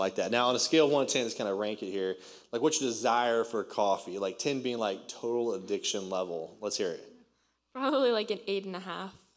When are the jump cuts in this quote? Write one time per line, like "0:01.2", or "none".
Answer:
none